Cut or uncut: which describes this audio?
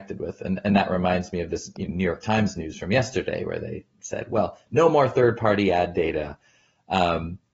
uncut